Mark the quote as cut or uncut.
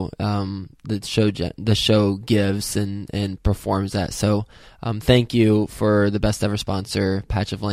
uncut